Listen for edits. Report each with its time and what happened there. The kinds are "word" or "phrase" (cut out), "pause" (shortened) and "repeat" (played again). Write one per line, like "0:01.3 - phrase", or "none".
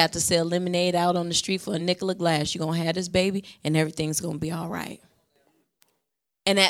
none